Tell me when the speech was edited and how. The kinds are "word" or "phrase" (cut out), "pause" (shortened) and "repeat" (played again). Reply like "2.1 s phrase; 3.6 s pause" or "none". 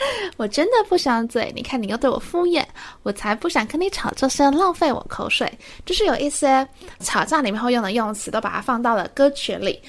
7.0 s word